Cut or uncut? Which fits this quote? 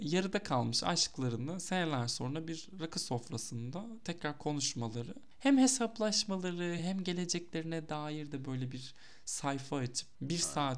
uncut